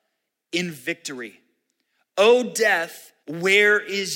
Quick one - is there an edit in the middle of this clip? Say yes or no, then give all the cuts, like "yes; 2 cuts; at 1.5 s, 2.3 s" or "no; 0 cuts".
yes; 1 cut; at 3.2 s